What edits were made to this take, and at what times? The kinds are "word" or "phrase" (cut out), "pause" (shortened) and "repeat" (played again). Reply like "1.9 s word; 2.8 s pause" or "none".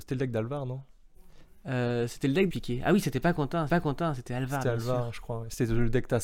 2.5 s phrase; 3.7 s repeat